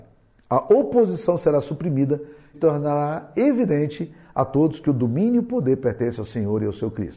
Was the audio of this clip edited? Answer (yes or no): yes